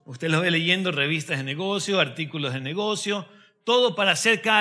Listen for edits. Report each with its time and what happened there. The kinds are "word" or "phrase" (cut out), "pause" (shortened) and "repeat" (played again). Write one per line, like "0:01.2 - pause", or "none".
none